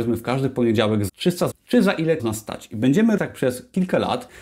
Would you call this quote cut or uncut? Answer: cut